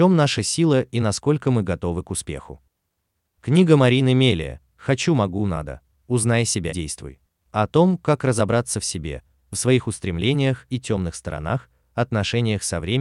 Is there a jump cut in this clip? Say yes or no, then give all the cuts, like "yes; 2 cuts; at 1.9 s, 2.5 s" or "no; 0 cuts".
yes; 2 cuts; at 6.7 s, 10.7 s